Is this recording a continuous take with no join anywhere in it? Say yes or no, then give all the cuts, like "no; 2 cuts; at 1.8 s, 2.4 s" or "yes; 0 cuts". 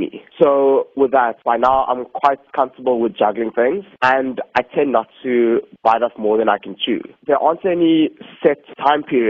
yes; 0 cuts